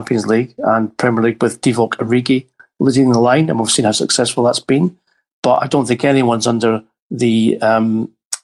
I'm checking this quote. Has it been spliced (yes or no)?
no